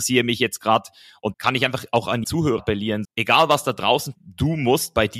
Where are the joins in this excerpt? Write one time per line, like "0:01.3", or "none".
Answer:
0:01.3
0:02.2
0:02.6
0:03.0
0:04.1